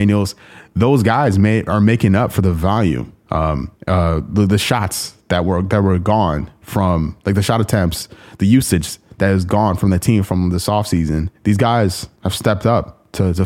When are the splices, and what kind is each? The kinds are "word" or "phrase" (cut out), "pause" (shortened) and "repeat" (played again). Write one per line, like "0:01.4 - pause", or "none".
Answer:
0:03.8 - pause
0:11.4 - pause
0:12.2 - pause